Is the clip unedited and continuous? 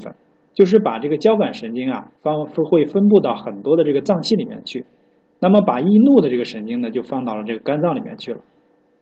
no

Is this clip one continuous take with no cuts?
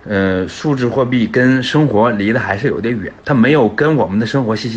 no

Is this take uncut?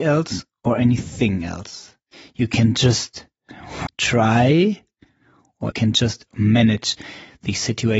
no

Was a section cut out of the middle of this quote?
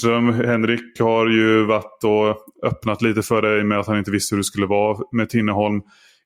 no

